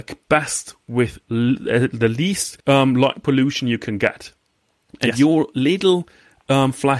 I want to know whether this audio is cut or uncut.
cut